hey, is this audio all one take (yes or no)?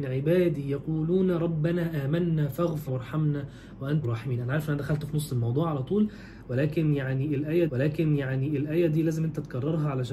no